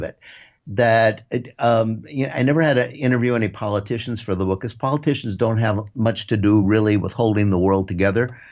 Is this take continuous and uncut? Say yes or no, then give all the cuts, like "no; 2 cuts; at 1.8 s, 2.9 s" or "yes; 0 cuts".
yes; 0 cuts